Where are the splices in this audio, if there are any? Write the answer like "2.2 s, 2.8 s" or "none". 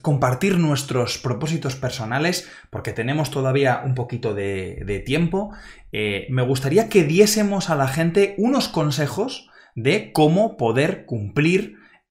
none